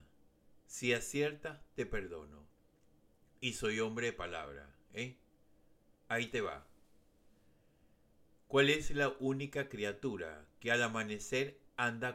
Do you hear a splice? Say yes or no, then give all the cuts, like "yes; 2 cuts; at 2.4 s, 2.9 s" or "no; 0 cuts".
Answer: no; 0 cuts